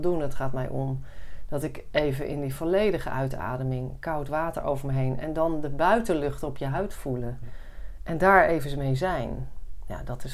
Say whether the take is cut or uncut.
uncut